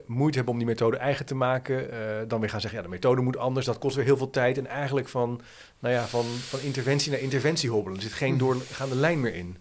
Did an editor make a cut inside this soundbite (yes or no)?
no